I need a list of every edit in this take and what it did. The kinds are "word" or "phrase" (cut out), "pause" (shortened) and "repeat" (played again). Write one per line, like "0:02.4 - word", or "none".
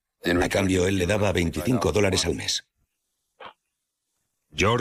none